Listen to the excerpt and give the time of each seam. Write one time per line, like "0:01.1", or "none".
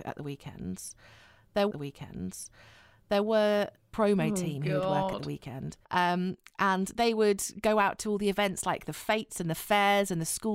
0:01.7
0:05.8